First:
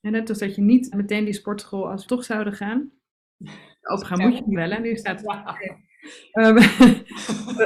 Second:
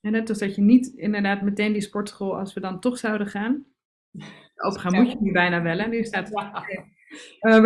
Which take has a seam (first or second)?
first